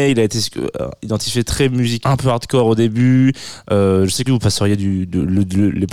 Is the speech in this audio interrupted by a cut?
yes; 2 cuts; at 2.0 s, 4.3 s

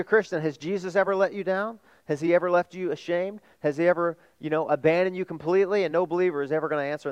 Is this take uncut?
yes; 0 cuts

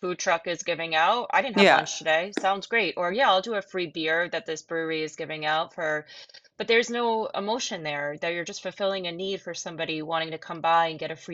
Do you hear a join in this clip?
no; 0 cuts

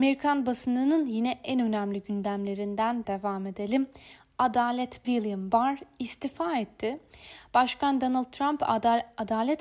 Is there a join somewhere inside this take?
yes; 2 cuts; at 3.0 s, 5.0 s

